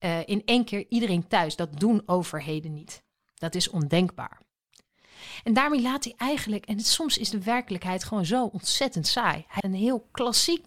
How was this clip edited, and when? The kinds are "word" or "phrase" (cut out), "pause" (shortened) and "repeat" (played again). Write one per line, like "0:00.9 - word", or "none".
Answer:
0:09.6 - word